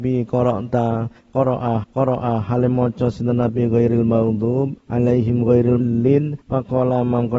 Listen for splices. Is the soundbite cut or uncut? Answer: cut